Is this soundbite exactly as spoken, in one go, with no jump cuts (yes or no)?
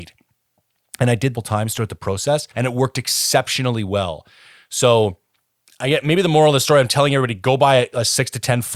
no